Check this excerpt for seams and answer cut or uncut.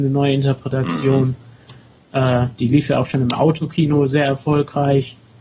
uncut